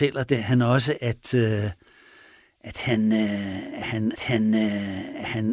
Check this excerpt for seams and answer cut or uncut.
cut